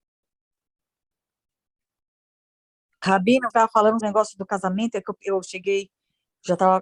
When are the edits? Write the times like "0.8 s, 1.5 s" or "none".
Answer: 3.5 s, 4.0 s